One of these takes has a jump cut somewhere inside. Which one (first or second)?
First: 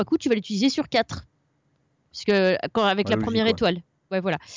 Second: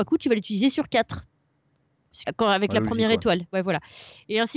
second